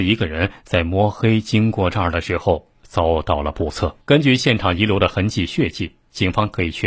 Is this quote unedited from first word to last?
no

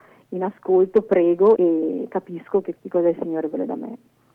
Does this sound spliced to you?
yes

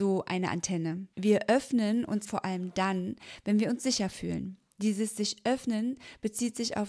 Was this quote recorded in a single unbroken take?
no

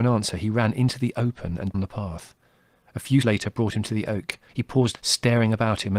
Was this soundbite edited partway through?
yes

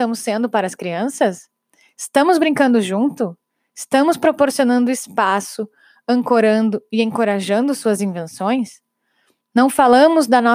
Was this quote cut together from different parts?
no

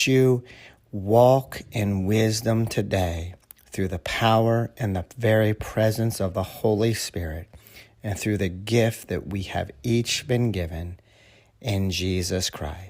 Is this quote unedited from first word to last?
yes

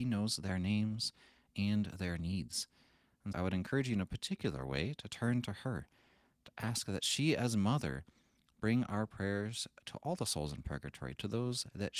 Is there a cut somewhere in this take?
yes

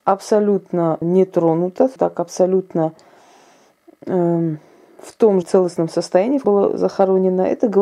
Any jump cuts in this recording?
yes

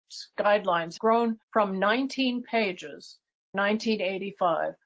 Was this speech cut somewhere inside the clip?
yes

